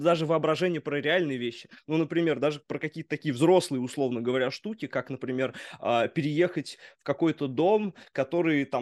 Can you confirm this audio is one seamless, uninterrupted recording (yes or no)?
yes